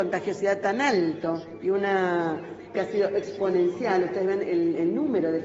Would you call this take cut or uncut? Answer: cut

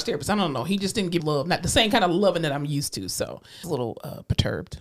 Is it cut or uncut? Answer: cut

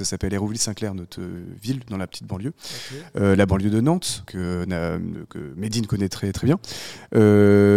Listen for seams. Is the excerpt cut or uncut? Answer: cut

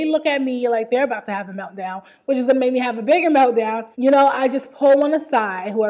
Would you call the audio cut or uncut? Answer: cut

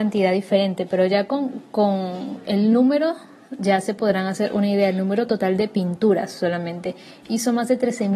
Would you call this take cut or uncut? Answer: uncut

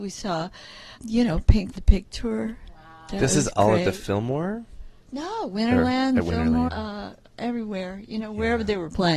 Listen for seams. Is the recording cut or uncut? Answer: cut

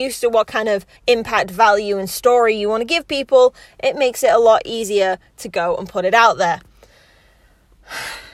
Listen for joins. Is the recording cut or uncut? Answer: cut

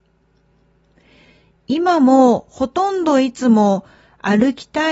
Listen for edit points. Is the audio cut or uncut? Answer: uncut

